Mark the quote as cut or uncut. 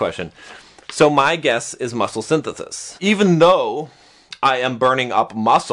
uncut